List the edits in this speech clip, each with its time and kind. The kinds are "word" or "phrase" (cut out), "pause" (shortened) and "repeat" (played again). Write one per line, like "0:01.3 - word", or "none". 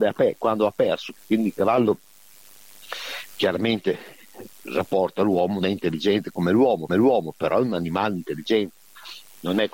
0:01.2 - pause
0:03.3 - pause
0:05.6 - word
0:06.9 - repeat